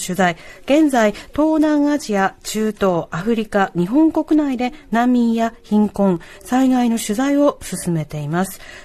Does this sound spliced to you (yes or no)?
no